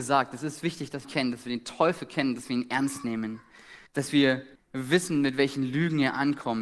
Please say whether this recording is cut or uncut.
cut